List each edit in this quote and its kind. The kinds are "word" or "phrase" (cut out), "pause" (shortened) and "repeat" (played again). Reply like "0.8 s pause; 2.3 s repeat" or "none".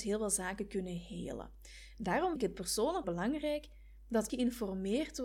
2.4 s word; 3.0 s phrase; 4.3 s word